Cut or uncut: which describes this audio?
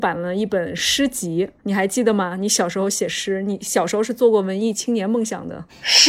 cut